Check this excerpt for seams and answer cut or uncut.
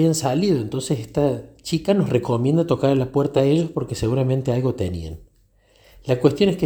uncut